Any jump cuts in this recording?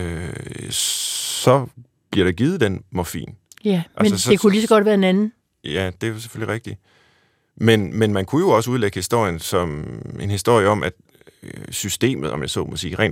no; 0 cuts

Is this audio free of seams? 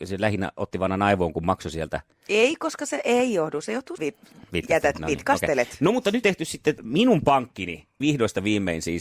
no; 4 cuts; at 4.0 s, 6.2 s, 6.8 s, 8.0 s

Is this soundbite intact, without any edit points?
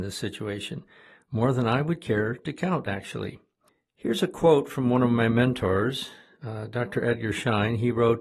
yes; 0 cuts

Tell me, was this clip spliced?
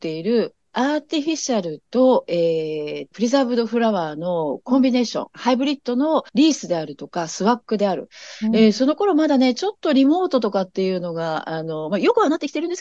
yes; 2 cuts; at 3.1 s, 6.3 s

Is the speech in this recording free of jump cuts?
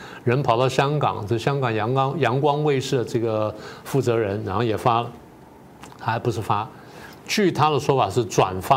yes; 0 cuts

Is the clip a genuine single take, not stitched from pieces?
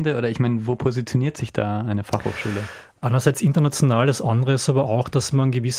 yes; 0 cuts

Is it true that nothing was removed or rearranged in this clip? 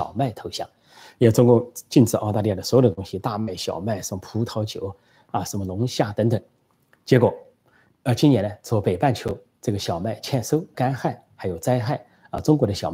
no; 1 cut; at 10.7 s

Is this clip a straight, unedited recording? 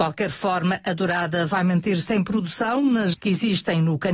no; 1 cut; at 3.1 s

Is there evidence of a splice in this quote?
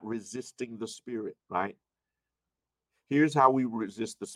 yes; 1 cut; at 1.4 s

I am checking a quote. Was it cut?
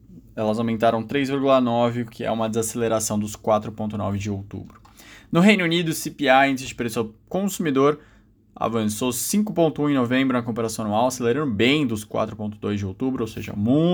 no; 0 cuts

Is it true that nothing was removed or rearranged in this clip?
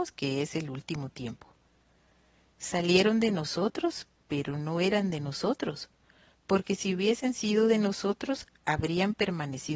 yes; 0 cuts

